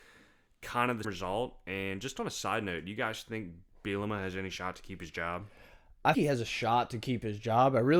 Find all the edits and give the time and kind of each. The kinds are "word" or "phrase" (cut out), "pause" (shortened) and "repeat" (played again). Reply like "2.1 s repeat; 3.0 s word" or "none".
1.0 s word; 6.1 s word

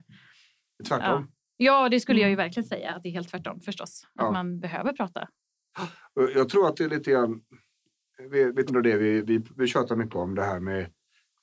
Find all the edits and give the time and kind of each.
8.7 s word

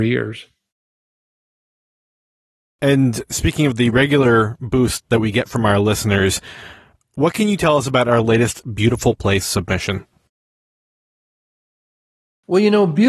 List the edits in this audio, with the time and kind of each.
none

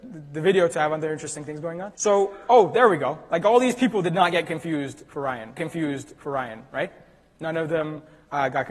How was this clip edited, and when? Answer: 1.9 s pause; 5.6 s repeat

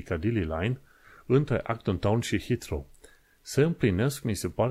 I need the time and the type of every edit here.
none

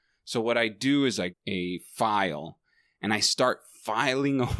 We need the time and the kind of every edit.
1.3 s word

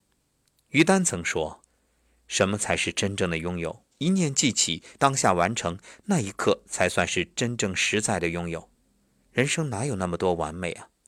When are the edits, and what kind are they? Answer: 1.7 s pause; 3.9 s pause; 5.0 s phrase; 8.7 s pause

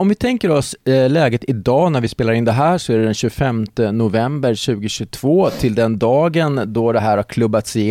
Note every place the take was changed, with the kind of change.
none

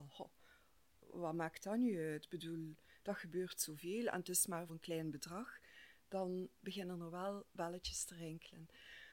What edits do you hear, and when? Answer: 1.1 s word; 4.7 s word

